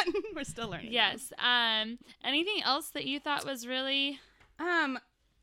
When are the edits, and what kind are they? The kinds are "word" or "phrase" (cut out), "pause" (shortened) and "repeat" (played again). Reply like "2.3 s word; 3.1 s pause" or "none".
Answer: none